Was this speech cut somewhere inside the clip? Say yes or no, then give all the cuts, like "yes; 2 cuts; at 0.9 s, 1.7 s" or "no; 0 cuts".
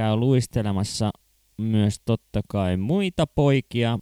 no; 0 cuts